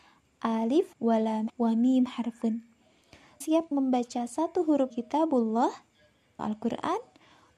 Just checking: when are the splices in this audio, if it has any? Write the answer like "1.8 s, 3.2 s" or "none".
0.9 s, 1.5 s, 3.4 s, 3.7 s, 4.9 s, 6.4 s